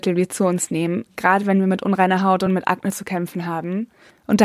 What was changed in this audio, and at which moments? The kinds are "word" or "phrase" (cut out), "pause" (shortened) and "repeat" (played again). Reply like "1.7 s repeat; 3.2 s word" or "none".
none